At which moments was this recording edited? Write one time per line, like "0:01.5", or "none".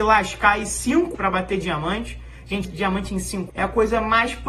0:01.1
0:02.6
0:03.5